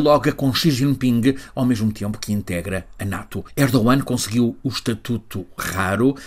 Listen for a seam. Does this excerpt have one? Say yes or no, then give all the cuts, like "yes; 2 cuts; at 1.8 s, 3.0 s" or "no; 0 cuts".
no; 0 cuts